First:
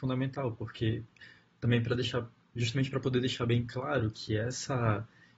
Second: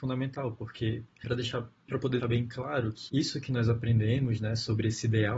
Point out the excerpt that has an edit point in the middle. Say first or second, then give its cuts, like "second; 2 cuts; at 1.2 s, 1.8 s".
second; 4 cuts; at 1.2 s, 1.9 s, 2.2 s, 3.1 s